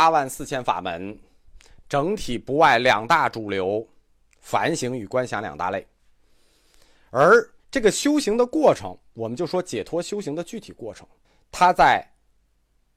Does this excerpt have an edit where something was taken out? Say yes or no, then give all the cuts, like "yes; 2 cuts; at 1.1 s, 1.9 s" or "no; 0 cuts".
yes; 2 cuts; at 7.6 s, 11.2 s